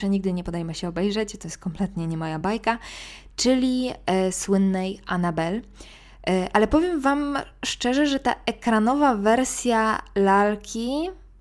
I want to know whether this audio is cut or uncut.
uncut